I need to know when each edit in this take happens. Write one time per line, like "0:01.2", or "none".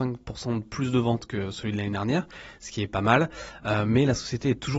none

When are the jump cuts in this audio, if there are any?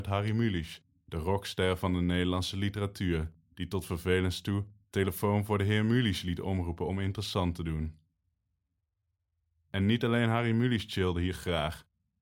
none

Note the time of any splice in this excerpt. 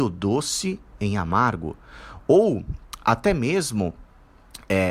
0:01.0

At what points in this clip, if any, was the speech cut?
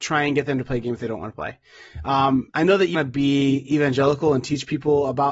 0:02.5
0:02.9

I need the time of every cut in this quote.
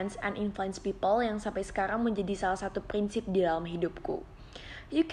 none

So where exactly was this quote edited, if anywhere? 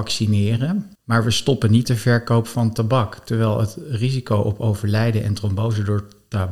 0:01.0
0:01.8

